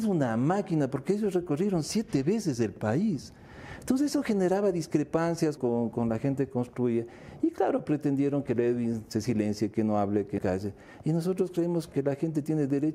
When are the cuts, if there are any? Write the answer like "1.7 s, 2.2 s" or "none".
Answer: 5.6 s, 10.4 s, 11.9 s